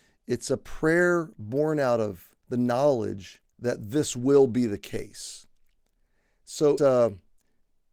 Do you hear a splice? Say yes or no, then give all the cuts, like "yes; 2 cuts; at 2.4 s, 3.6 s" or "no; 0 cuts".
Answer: yes; 3 cuts; at 2.4 s, 3.5 s, 6.8 s